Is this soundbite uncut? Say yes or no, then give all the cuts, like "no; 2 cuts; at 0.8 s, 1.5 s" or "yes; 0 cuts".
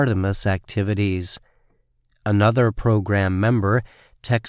yes; 0 cuts